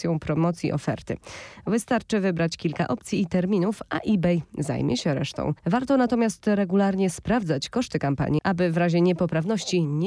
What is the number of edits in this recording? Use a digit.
1